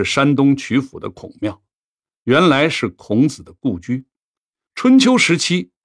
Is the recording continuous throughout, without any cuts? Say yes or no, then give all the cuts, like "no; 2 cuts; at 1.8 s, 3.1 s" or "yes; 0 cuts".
yes; 0 cuts